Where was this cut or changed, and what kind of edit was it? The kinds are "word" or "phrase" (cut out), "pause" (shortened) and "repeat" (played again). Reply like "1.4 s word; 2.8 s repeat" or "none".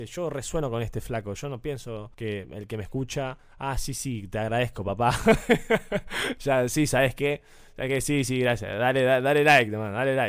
2.1 s pause